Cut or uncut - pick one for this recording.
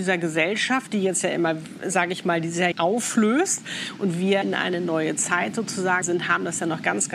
cut